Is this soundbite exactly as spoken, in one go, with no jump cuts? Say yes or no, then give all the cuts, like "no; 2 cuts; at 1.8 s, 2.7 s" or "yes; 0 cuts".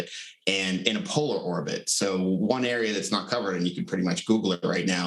no; 1 cut; at 3.8 s